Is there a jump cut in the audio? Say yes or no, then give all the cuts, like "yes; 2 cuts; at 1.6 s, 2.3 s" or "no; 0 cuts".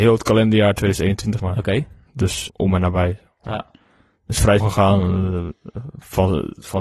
yes; 3 cuts; at 1.4 s, 2.5 s, 4.6 s